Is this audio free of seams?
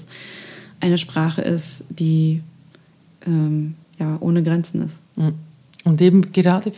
yes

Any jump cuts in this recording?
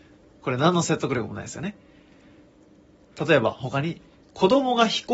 no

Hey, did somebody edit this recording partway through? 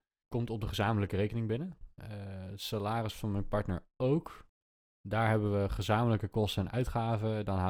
no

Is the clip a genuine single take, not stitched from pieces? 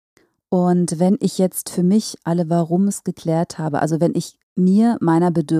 no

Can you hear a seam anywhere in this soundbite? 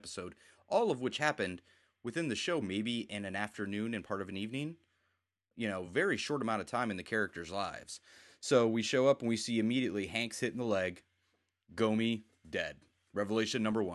no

